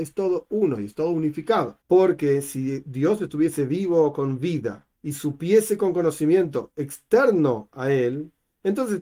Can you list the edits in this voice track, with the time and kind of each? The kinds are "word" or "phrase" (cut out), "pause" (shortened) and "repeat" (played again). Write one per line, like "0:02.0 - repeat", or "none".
0:01.8 - pause
0:04.9 - pause